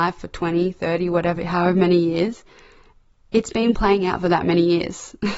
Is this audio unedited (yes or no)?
yes